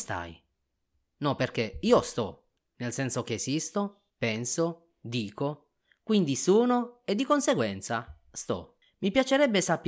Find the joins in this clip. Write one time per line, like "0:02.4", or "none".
0:04.1

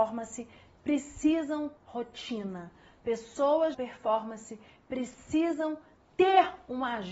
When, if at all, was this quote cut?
0:01.8
0:03.7
0:06.0

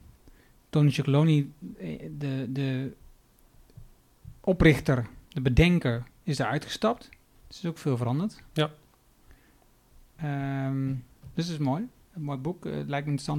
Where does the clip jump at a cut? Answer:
0:05.3
0:07.4

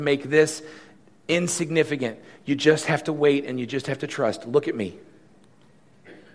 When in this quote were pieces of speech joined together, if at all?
none

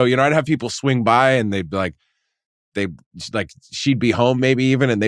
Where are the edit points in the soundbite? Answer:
none

